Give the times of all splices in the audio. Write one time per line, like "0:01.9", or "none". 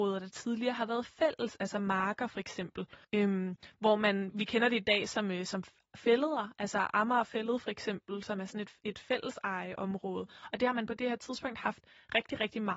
0:03.0
0:04.3